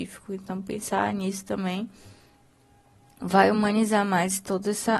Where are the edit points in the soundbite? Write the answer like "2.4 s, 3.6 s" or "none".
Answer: none